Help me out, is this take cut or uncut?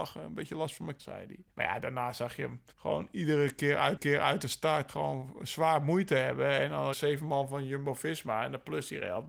cut